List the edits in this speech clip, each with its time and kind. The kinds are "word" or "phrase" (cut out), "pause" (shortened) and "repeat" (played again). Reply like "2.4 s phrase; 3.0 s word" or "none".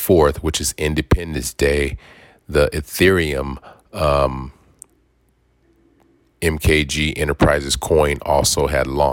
none

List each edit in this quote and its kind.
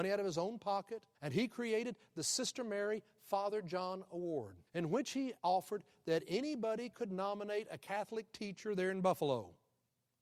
1.1 s pause; 4.7 s pause; 5.4 s pause

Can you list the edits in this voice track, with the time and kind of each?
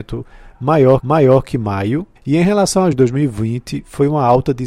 1.0 s repeat; 2.2 s pause; 2.9 s word

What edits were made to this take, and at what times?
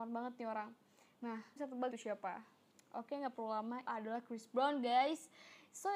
1.6 s word; 1.9 s word; 3.8 s word

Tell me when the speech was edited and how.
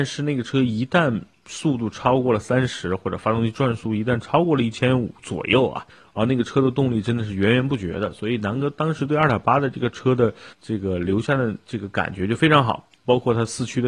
5.9 s pause; 10.5 s pause

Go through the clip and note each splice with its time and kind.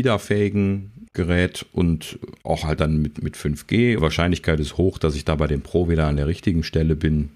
1.1 s word; 2.8 s word; 4.0 s phrase

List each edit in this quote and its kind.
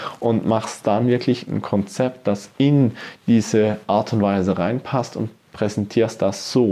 none

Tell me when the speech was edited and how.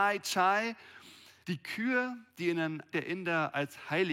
1.4 s pause; 2.3 s pause; 2.9 s word

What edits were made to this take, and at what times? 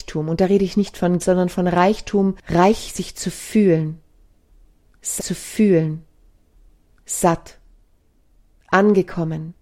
1.2 s word; 2.4 s pause; 5.2 s repeat

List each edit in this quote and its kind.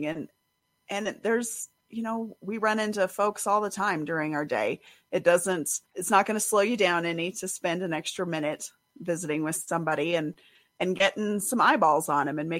1.8 s pause; 5.9 s pause

